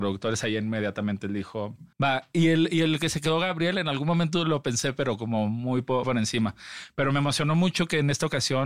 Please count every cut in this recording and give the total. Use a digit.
2